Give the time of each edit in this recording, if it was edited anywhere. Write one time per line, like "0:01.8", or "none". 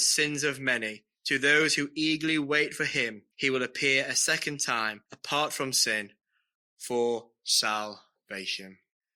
0:01.2
0:03.3
0:05.1